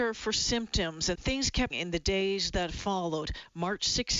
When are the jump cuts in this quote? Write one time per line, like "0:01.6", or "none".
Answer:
0:01.1
0:01.7